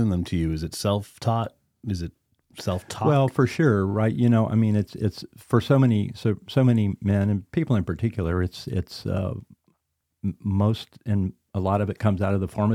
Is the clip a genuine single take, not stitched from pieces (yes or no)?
yes